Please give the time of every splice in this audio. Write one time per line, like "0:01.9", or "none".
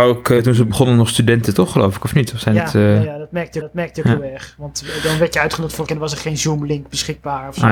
0:03.6
0:05.9